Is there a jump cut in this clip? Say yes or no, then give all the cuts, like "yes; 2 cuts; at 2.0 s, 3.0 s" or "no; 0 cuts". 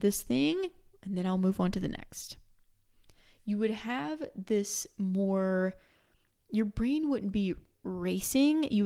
no; 0 cuts